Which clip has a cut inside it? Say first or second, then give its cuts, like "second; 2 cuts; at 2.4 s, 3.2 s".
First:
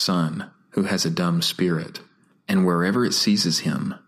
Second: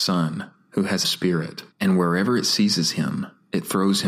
second; 2 cuts; at 1.0 s, 1.7 s